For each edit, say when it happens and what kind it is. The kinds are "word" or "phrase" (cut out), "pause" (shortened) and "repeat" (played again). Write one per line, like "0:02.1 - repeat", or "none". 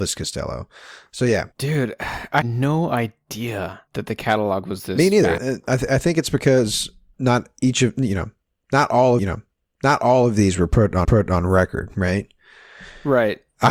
0:01.5 - pause
0:02.4 - word
0:03.9 - pause
0:05.4 - word
0:07.1 - word
0:09.2 - repeat
0:11.0 - repeat